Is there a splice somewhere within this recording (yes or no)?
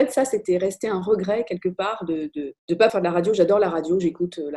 yes